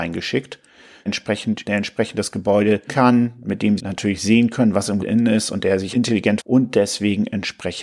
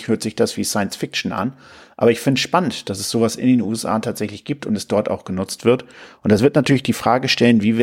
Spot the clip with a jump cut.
first; 7 cuts; at 1.1 s, 1.6 s, 2.9 s, 3.8 s, 5.0 s, 5.9 s, 6.4 s

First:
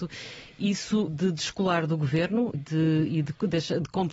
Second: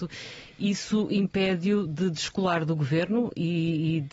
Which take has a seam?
first; 2 cuts; at 1.1 s, 2.5 s

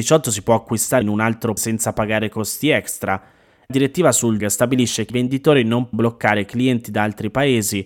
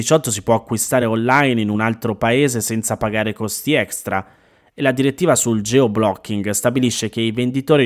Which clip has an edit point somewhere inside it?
first; 7 cuts; at 1.0 s, 1.6 s, 3.7 s, 4.4 s, 5.1 s, 5.9 s, 6.8 s

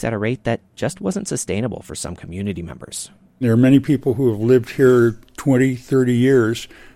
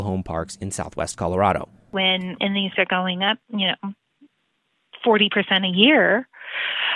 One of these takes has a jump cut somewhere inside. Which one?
second; 2 cuts; at 2.4 s, 2.7 s

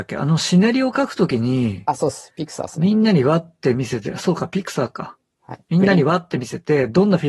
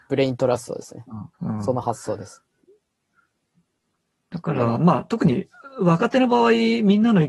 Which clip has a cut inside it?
second; 1 cut; at 1.3 s

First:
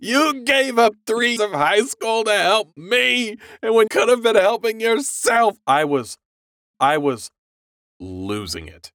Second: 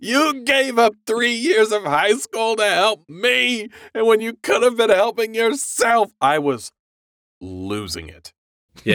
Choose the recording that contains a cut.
first; 3 cuts; at 1.4 s, 3.9 s, 6.7 s

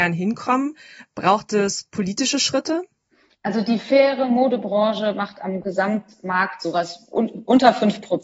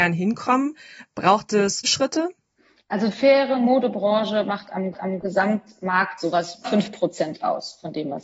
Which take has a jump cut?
second; 4 cuts; at 1.8 s, 3.1 s, 4.9 s, 6.6 s

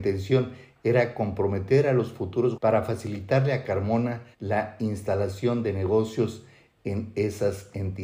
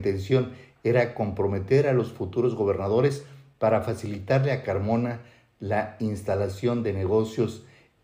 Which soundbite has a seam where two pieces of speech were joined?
first; 2 cuts; at 2.5 s, 4.3 s

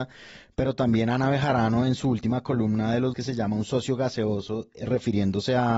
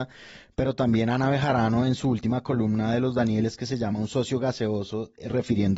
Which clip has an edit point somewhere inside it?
first; 1 cut; at 3.1 s

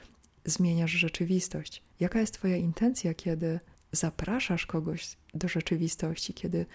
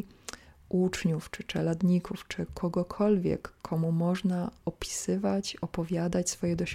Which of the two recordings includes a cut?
first; 2 cuts; at 1.9 s, 3.7 s

